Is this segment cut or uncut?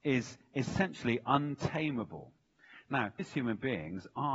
cut